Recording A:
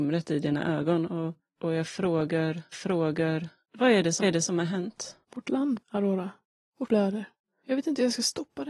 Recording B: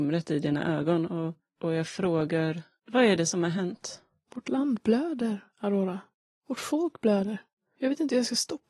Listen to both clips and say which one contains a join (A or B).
A